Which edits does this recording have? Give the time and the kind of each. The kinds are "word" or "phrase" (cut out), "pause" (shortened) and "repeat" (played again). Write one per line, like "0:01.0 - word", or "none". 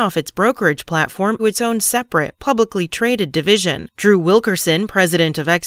0:01.4 - word